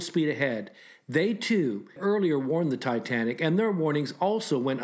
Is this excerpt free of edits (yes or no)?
no